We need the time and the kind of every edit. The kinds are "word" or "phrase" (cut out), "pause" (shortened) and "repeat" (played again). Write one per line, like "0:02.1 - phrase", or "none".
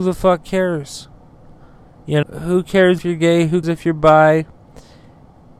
0:02.2 - word
0:03.0 - word
0:03.6 - word

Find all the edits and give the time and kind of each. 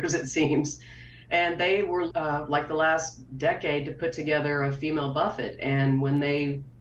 0:02.1 - word

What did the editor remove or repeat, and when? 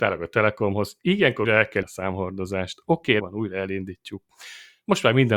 0:01.5 - word
0:01.8 - word
0:03.2 - word

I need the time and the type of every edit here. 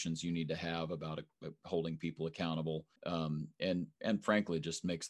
0:03.0 - pause

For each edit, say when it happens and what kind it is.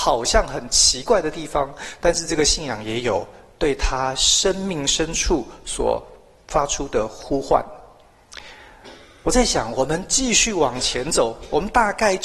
none

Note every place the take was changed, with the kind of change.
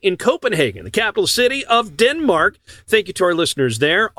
none

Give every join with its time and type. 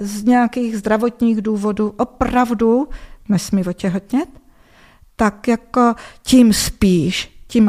none

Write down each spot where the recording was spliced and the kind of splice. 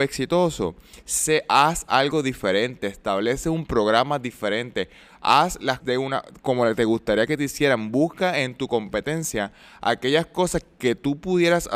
0:05.8 - word

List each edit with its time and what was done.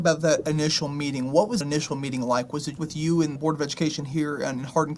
0:01.6 - word
0:02.8 - word
0:03.4 - word

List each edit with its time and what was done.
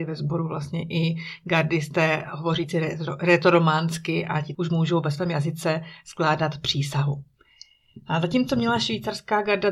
0:04.5 - word

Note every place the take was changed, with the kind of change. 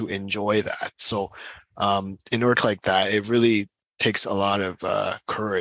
0:02.6 - phrase

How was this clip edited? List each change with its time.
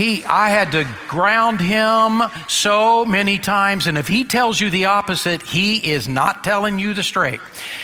none

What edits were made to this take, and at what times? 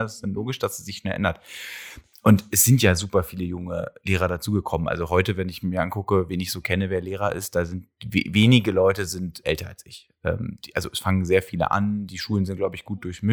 0:09.4 - word

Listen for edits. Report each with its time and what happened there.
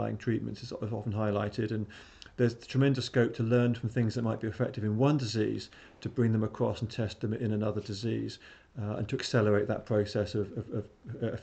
none

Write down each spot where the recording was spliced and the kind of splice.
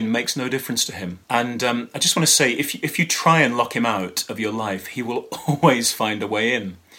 0:01.2 - pause

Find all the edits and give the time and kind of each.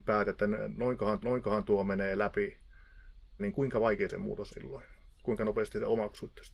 0:01.2 - repeat
0:03.4 - word
0:04.5 - word

